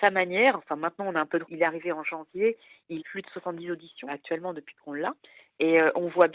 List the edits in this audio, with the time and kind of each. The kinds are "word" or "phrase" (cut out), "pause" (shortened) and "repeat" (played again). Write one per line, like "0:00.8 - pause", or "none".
0:01.4 - word
0:03.0 - word
0:04.1 - word